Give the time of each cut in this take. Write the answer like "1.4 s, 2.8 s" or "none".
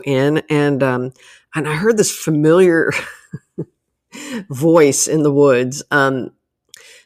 none